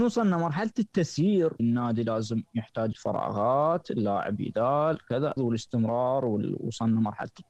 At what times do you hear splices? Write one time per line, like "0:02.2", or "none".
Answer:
0:01.6
0:02.9
0:04.4
0:05.4